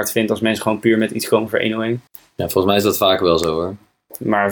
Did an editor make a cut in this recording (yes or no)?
yes